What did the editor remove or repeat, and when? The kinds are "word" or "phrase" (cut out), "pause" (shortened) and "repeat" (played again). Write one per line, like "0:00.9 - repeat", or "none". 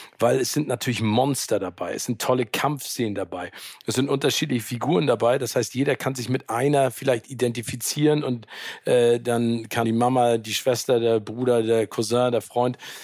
0:09.8 - word